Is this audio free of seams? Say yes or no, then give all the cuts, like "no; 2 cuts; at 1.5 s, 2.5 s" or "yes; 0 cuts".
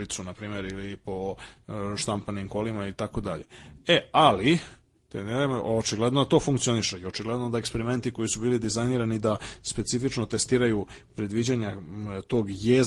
yes; 0 cuts